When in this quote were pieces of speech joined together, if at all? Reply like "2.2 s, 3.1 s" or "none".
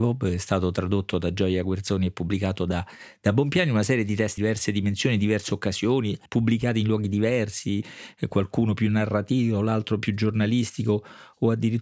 4.4 s, 6.3 s